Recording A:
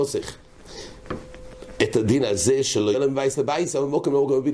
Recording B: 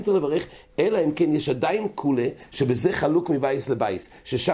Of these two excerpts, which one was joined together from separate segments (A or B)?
A